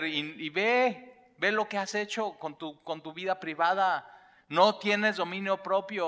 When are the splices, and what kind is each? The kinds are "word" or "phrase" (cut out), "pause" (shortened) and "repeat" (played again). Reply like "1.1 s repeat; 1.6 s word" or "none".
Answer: none

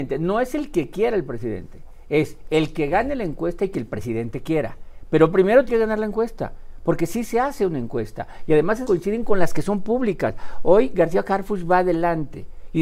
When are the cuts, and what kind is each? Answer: 5.7 s word; 8.8 s word

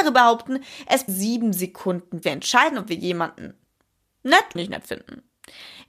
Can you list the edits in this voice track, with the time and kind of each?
1.1 s word; 2.2 s word; 4.6 s word

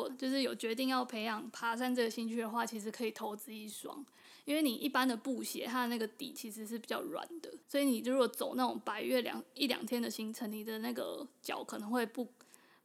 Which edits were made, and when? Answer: 7.6 s pause

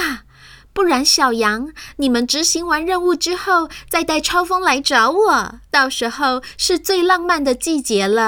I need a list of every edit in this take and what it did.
5.6 s pause

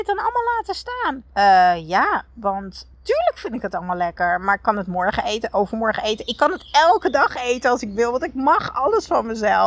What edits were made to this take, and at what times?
1.3 s pause

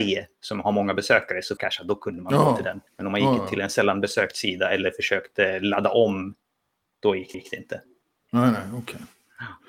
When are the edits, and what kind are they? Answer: 1.6 s phrase; 2.9 s pause; 7.3 s repeat

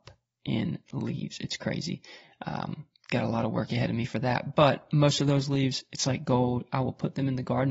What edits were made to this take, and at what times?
none

